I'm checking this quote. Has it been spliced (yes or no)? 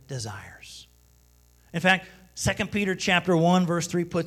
no